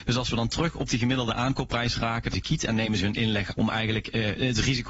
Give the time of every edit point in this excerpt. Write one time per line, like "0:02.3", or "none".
0:02.3
0:03.5